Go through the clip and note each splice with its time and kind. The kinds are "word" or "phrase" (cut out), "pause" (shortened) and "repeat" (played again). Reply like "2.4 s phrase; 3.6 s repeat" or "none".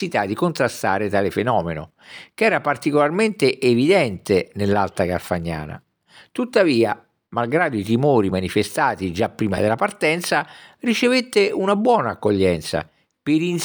none

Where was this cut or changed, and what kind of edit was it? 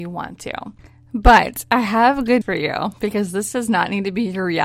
2.4 s word

